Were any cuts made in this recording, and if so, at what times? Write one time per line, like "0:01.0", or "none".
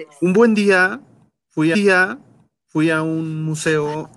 0:01.7